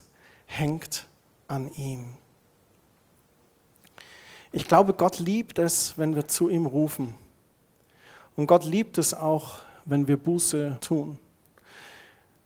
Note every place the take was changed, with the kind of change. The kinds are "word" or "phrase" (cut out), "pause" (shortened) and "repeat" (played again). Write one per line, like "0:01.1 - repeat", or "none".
none

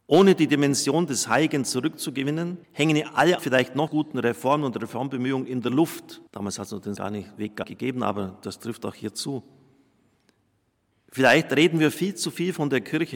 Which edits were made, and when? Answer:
0:02.6 - pause
0:03.4 - word
0:03.9 - word
0:06.3 - pause
0:07.0 - word
0:07.6 - word

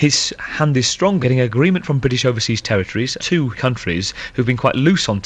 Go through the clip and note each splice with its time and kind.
0:01.2 - word
0:03.2 - word
0:03.6 - word

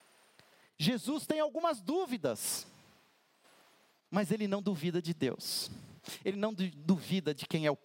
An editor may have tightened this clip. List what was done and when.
none

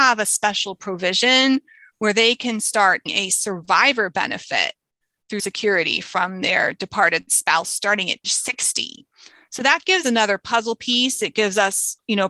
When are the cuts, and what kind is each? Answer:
0:03.1 - word
0:05.4 - word
0:08.2 - word
0:10.0 - word

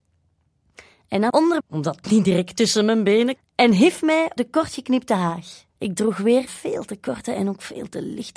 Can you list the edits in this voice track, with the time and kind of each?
0:01.3 - word
0:01.6 - phrase
0:02.0 - word
0:03.4 - word
0:04.4 - word
0:05.7 - pause
0:06.5 - word

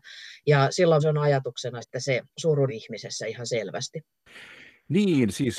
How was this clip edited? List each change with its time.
0:01.0 - word
0:01.8 - word
0:02.7 - word

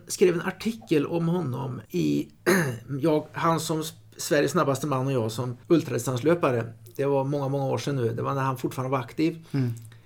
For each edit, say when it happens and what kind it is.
0:01.9 - pause
0:05.6 - pause

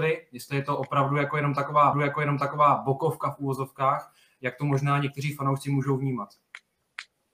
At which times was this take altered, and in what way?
0:01.9 - repeat

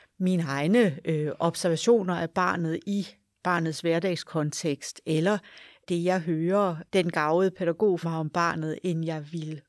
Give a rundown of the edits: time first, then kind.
0:08.0 - word

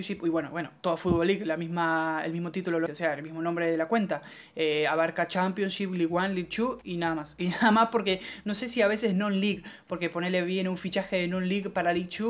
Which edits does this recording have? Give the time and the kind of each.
0:02.9 - word
0:06.8 - word

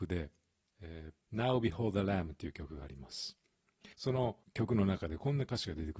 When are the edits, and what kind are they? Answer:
0:01.2 - pause
0:03.9 - pause
0:04.4 - pause

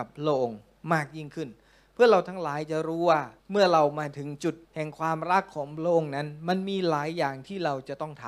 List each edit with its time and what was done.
0:03.4 - pause
0:04.6 - pause

